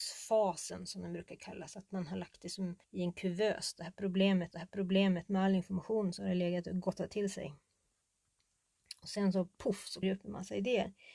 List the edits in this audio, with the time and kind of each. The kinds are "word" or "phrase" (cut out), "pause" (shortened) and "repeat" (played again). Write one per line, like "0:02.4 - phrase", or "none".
0:02.8 - pause
0:04.5 - repeat
0:10.0 - word